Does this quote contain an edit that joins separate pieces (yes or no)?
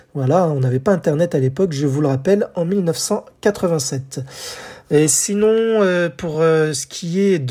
no